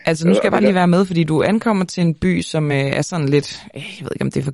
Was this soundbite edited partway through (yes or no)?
no